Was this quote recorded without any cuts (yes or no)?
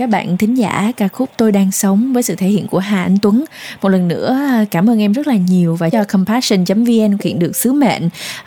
no